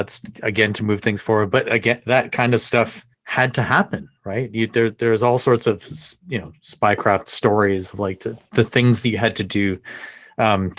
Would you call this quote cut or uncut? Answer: cut